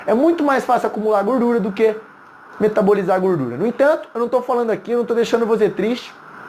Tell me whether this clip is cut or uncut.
uncut